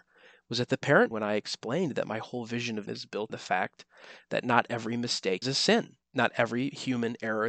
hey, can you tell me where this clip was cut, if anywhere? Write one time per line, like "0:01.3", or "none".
0:01.1
0:02.9
0:03.3
0:05.4
0:06.0